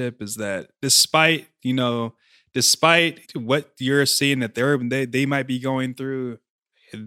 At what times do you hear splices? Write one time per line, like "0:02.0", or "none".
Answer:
0:03.2